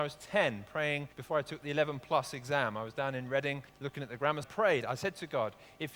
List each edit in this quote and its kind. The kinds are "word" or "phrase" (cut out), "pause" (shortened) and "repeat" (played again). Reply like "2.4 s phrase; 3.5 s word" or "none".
1.1 s pause; 3.7 s pause; 4.4 s phrase